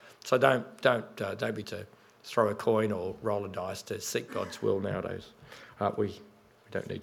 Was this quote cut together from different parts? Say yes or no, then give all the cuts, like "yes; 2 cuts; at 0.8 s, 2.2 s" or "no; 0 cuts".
yes; 1 cut; at 1.6 s